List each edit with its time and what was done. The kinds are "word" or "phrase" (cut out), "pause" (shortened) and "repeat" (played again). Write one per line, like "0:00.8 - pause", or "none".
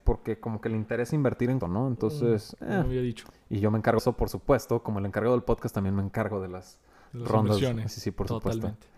0:01.6 - word
0:04.0 - word
0:07.9 - word